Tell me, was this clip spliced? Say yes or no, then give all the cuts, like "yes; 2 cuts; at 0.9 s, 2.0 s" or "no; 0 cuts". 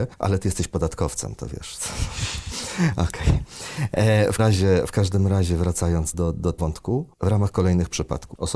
yes; 3 cuts; at 4.4 s, 6.1 s, 6.6 s